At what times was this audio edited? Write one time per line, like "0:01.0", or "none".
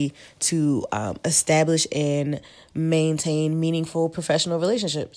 none

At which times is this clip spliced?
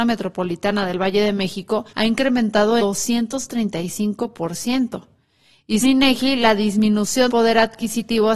0:01.9
0:02.8
0:05.8
0:07.3

